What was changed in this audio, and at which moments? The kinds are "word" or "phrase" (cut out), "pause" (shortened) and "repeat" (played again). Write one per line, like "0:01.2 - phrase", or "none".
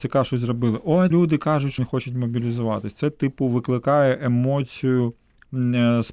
0:01.1 - word
0:01.8 - word